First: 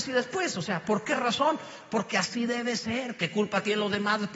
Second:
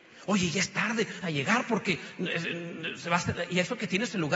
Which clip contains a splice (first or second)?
second